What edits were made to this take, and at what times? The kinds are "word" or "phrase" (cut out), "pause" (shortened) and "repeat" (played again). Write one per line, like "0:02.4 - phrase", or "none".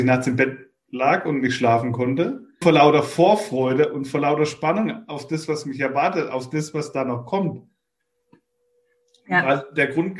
0:02.6 - word